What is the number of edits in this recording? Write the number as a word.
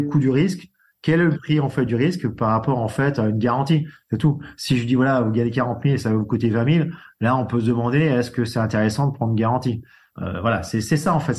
zero